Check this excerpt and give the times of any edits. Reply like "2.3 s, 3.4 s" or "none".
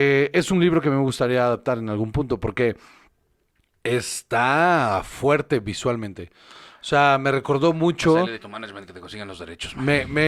8.3 s